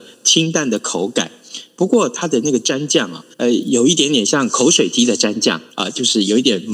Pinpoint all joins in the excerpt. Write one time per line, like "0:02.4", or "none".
0:03.3
0:05.7

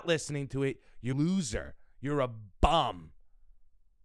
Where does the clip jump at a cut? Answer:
0:01.1

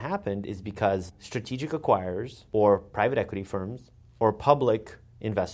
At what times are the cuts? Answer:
none

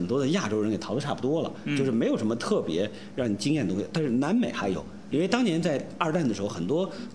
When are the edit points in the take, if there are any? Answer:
none

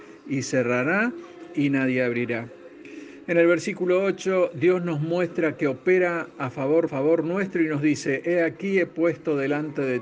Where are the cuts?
0:06.9

